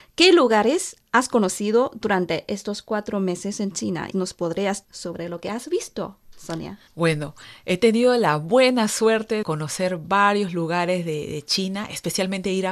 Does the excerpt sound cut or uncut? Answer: cut